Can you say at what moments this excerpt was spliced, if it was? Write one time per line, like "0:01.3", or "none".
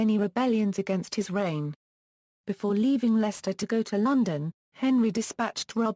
none